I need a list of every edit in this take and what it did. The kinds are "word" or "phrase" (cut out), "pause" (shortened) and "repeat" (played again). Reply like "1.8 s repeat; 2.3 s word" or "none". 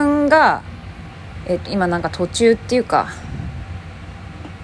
1.6 s word